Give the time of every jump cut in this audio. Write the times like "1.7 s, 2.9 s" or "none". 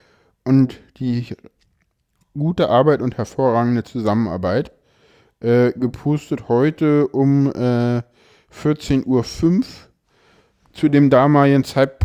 none